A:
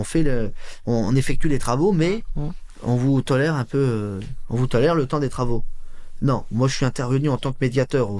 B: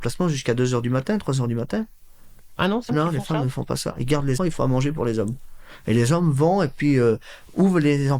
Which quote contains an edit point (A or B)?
B